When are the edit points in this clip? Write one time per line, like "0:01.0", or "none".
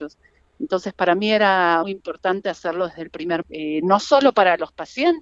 0:01.8
0:03.4